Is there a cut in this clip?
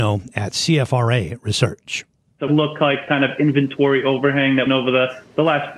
yes; 3 cuts; at 2.5 s, 3.1 s, 4.7 s

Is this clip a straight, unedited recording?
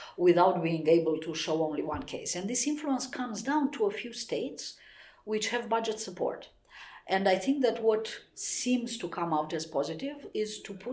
yes; 0 cuts

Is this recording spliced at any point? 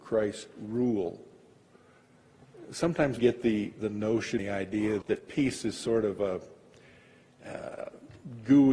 yes; 3 cuts; at 3.2 s, 4.4 s, 5.0 s

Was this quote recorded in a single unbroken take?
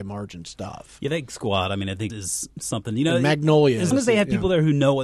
no; 3 cuts; at 1.3 s, 2.1 s, 3.9 s

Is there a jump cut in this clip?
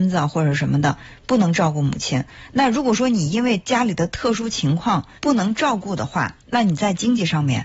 yes; 2 cuts; at 5.2 s, 6.4 s

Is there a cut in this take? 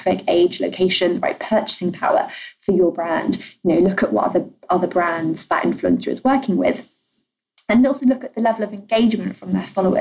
no; 0 cuts

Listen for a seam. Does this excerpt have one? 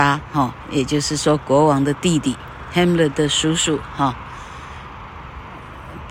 no; 0 cuts

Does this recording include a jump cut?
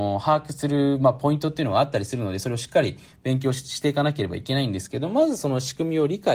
no; 0 cuts

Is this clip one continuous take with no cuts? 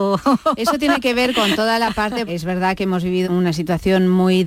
no; 2 cuts; at 2.3 s, 3.2 s

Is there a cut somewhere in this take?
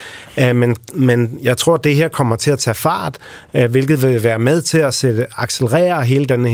no; 0 cuts

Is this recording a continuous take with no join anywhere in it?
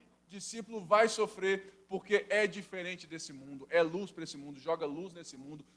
yes; 0 cuts

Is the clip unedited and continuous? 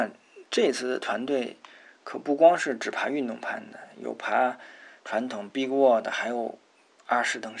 yes; 0 cuts

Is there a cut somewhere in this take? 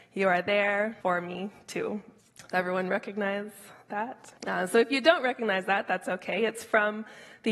yes; 3 cuts; at 1.0 s, 2.2 s, 4.4 s

